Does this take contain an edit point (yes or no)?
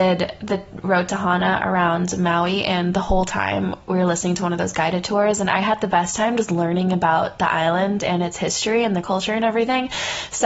no